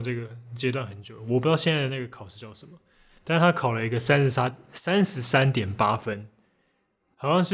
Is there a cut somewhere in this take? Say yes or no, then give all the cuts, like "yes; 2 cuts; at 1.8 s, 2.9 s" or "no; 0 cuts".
no; 0 cuts